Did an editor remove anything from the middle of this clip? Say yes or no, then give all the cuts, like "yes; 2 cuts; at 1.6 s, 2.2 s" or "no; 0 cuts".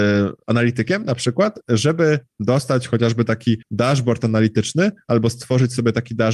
yes; 1 cut; at 3.6 s